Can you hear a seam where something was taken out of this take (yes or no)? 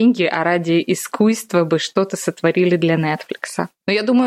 no